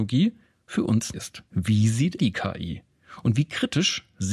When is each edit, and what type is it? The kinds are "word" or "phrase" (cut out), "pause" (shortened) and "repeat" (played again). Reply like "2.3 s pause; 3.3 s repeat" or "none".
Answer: 1.1 s word; 1.5 s pause; 2.2 s word